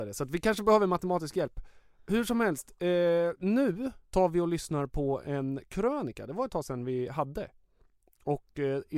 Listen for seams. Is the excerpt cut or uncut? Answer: cut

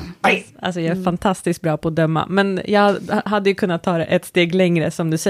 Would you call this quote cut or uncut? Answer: uncut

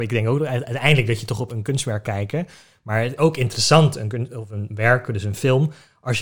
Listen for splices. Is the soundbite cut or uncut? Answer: cut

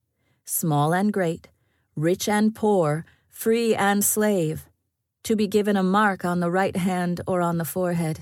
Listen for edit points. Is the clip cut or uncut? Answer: uncut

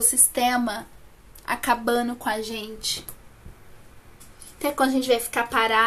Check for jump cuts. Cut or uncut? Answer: uncut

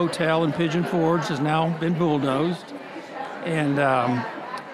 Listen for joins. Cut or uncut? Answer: cut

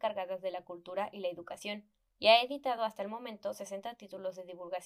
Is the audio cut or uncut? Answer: uncut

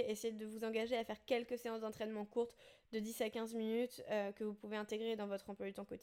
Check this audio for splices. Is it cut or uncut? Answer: uncut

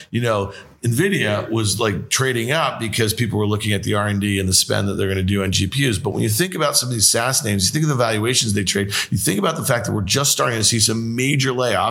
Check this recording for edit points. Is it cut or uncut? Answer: uncut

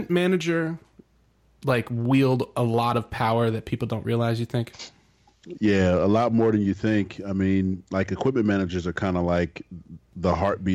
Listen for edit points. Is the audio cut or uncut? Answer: uncut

